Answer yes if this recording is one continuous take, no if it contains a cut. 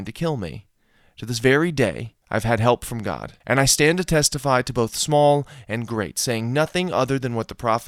no